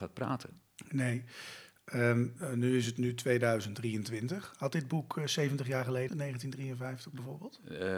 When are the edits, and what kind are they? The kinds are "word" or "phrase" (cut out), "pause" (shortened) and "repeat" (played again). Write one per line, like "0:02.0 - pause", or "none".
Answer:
0:06.1 - word